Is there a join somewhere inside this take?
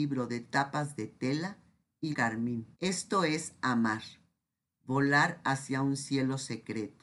yes; 2 cuts; at 2.1 s, 2.7 s

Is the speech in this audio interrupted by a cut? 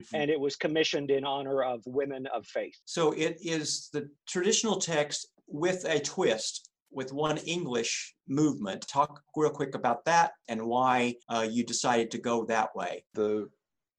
yes; 4 cuts; at 2.8 s, 5.3 s, 11.2 s, 13.1 s

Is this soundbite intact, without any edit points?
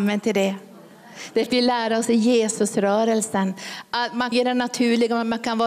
no; 2 cuts; at 1.5 s, 4.3 s

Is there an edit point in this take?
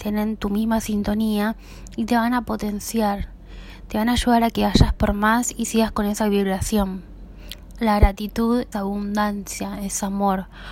yes; 1 cut; at 8.7 s

